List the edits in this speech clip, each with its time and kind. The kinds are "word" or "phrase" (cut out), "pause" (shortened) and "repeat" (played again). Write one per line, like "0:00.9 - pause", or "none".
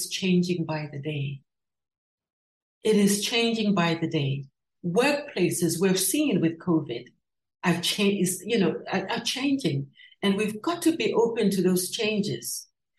none